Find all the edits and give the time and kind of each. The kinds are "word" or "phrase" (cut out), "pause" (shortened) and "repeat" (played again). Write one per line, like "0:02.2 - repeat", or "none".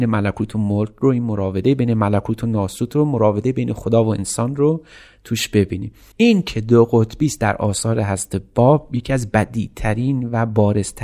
none